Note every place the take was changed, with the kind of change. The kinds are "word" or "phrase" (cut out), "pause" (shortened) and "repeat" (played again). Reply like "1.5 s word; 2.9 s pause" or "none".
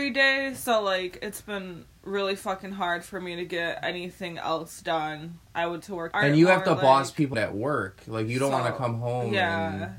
5.4 s pause; 5.8 s word; 6.1 s phrase; 7.3 s word